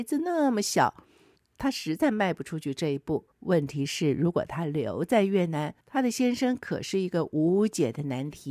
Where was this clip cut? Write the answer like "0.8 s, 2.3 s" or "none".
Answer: 1.4 s, 3.3 s, 5.8 s